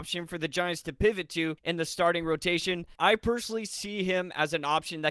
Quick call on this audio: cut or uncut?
cut